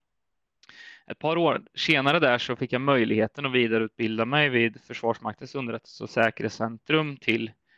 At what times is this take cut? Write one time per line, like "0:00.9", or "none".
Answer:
none